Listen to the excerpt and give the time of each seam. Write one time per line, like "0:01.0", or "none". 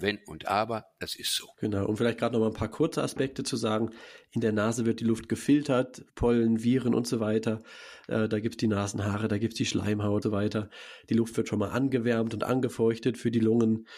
0:01.5
0:06.1
0:10.2